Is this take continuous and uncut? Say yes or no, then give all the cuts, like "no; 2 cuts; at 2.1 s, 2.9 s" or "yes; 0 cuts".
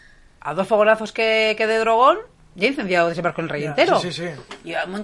yes; 0 cuts